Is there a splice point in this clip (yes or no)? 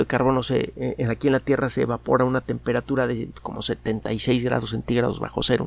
no